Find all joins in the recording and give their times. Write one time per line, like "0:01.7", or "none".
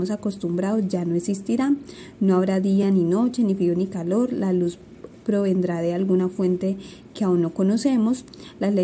none